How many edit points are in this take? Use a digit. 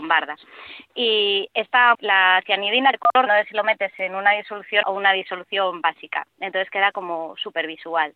4